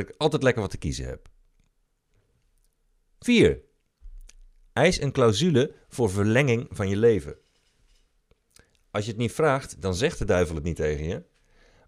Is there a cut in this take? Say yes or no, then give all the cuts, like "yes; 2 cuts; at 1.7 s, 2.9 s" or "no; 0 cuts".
no; 0 cuts